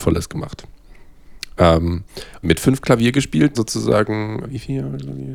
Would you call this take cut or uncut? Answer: cut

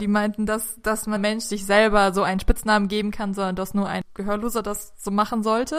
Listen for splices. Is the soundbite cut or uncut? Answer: cut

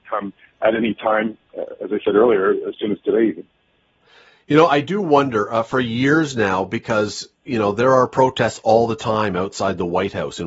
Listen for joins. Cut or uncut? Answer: uncut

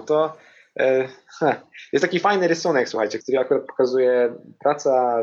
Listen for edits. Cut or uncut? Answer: cut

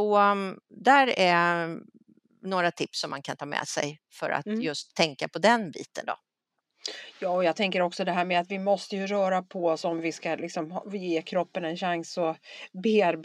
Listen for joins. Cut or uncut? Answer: uncut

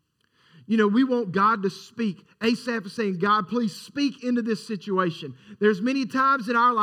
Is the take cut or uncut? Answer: uncut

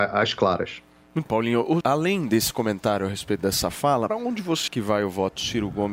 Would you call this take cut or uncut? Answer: cut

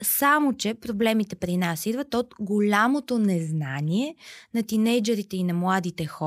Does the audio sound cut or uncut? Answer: uncut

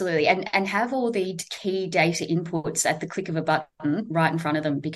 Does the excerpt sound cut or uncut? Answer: uncut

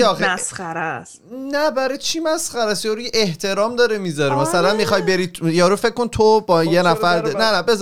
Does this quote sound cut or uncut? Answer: uncut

